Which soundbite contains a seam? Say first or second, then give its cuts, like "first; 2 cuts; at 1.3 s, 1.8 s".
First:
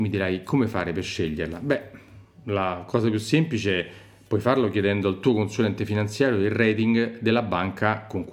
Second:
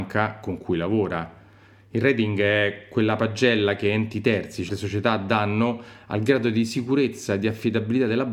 second; 1 cut; at 4.7 s